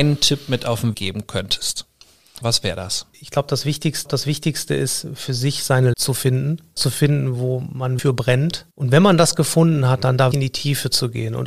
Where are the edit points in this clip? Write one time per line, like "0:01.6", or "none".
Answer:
0:00.9
0:02.4
0:03.1
0:04.0
0:05.9
0:06.8
0:08.0
0:08.7
0:10.3